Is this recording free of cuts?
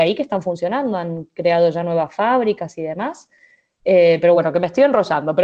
yes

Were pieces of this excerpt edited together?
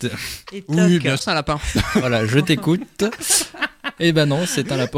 yes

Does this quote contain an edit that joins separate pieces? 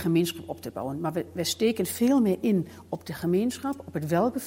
no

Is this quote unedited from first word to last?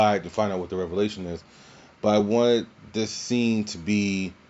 yes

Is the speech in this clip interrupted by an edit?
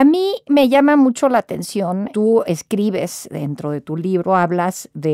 no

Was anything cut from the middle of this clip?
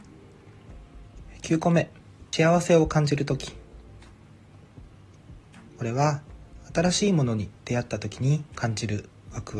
yes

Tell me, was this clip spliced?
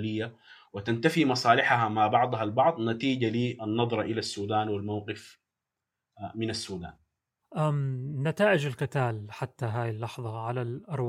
no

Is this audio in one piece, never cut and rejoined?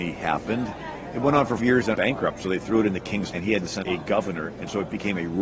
no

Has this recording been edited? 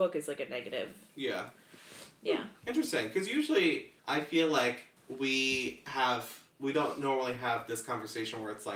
yes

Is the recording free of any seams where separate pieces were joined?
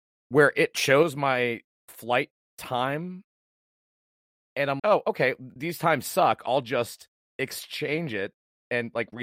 no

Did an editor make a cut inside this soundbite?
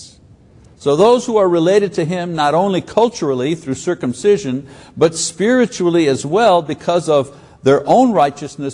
no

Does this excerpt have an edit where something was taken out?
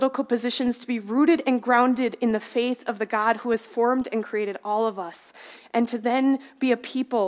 no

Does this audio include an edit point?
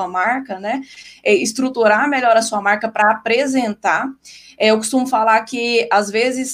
no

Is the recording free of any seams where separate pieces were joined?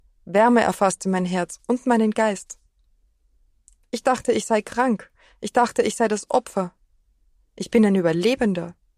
yes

